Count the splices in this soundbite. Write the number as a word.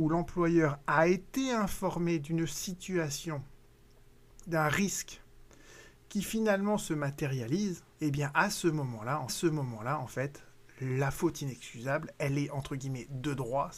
two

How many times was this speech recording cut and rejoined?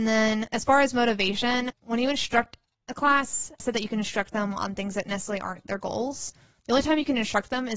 two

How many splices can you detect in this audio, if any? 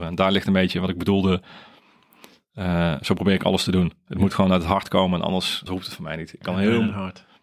one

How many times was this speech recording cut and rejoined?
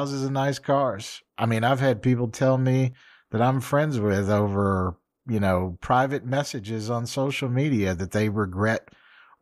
zero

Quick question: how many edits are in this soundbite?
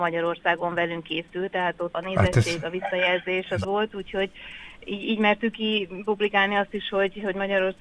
two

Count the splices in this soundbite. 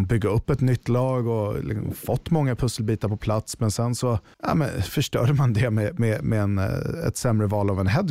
one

